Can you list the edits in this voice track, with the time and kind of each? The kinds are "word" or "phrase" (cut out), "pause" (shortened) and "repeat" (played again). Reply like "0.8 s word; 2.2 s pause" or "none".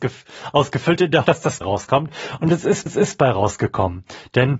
1.2 s word; 1.6 s phrase; 2.9 s repeat